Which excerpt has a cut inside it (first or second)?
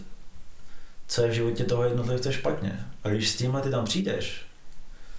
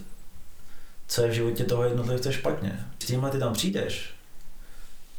second